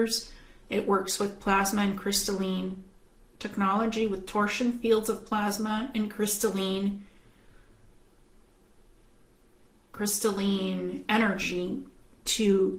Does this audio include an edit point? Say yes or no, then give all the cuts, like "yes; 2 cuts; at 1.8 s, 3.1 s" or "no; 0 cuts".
no; 0 cuts